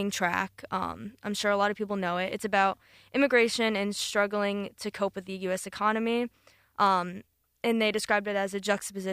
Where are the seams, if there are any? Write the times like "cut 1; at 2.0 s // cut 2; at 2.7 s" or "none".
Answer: none